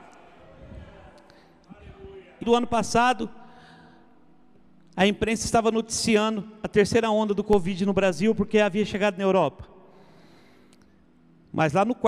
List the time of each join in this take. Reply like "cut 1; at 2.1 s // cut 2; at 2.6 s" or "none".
cut 1; at 2.4 s